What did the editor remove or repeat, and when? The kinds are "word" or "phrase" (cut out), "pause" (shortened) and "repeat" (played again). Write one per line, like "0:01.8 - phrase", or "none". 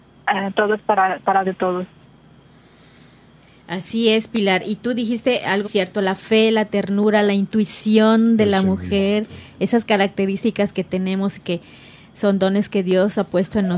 0:01.4 - word
0:05.6 - word